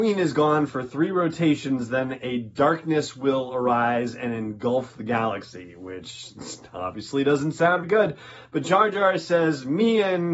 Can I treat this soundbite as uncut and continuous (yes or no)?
no